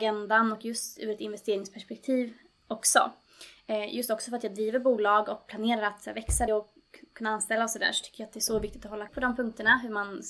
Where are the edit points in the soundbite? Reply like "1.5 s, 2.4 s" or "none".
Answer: 6.5 s, 9.1 s